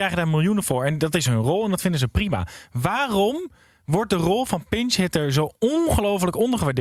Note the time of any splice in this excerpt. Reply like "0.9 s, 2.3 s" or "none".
none